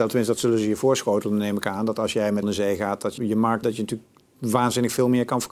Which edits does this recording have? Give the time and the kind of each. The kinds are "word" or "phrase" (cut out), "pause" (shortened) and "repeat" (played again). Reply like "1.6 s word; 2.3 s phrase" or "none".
2.4 s word; 3.2 s word; 3.6 s word